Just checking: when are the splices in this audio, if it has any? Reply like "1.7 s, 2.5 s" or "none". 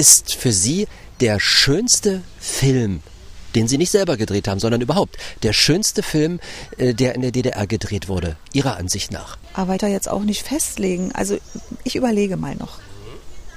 9.8 s